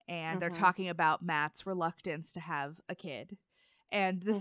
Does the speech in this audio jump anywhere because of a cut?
no; 0 cuts

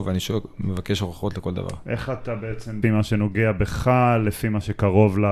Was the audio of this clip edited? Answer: yes; 1 cut; at 2.8 s

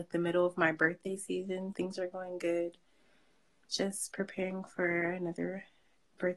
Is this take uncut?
no; 1 cut; at 1.7 s

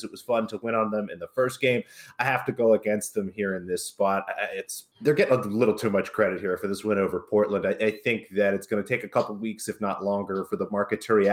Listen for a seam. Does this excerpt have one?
yes; 1 cut; at 4.9 s

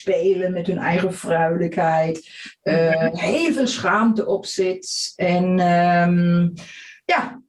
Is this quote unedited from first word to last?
yes; 0 cuts

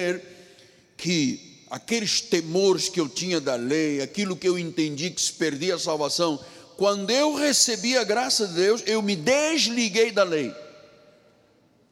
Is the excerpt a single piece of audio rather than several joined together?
yes; 0 cuts

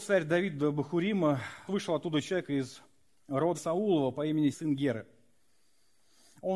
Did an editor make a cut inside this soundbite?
yes; 3 cuts; at 1.7 s, 3.5 s, 4.5 s

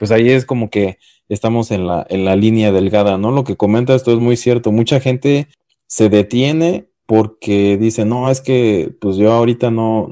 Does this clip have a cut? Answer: no; 0 cuts

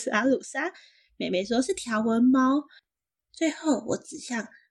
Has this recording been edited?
no; 0 cuts

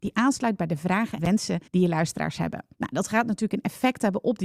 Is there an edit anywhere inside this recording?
yes; 3 cuts; at 1.2 s, 1.7 s, 2.7 s

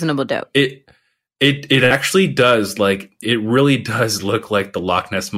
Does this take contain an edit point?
yes; 1 cut; at 3.2 s

